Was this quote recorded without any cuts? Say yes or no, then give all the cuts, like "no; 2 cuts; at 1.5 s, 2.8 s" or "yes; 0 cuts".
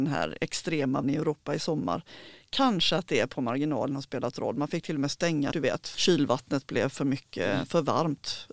no; 3 cuts; at 1.0 s, 5.5 s, 5.9 s